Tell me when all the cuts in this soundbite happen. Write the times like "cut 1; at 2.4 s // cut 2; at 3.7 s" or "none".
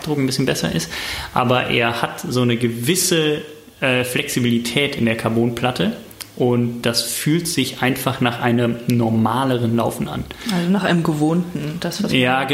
none